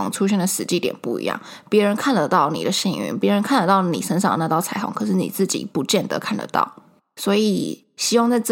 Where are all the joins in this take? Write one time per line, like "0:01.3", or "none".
none